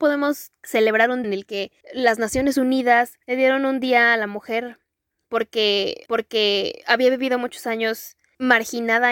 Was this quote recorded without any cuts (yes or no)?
no